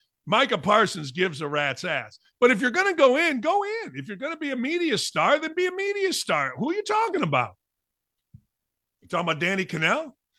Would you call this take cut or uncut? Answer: uncut